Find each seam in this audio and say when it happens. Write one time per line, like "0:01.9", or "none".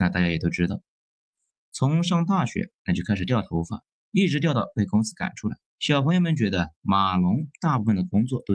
0:05.7
0:06.8